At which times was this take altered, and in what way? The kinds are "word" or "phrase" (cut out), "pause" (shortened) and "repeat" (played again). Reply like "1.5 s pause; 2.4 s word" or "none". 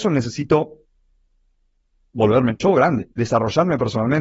3.1 s pause